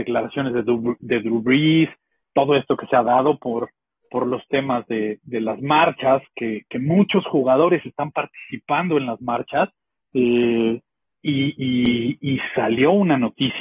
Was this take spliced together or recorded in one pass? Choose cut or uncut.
uncut